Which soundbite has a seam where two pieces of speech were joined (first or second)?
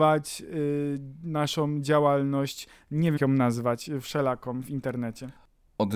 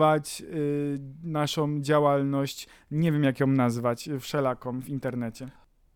first